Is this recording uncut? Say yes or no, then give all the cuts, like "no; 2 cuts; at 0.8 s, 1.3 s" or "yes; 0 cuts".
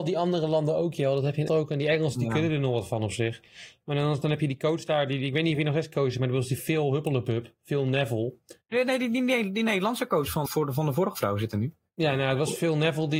no; 3 cuts; at 1.5 s, 4.2 s, 10.5 s